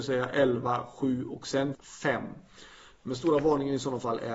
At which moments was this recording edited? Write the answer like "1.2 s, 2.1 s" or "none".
1.7 s